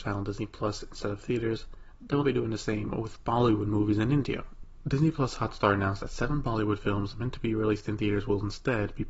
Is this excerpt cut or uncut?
cut